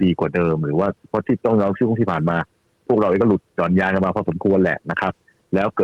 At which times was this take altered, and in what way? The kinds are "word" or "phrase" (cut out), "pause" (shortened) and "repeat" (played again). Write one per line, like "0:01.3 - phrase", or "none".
0:03.5 - pause